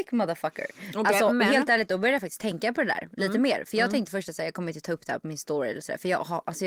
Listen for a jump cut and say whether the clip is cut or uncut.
uncut